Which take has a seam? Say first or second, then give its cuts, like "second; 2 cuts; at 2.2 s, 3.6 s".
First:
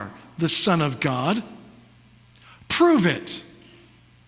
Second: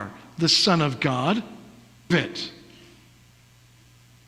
second; 1 cut; at 2.1 s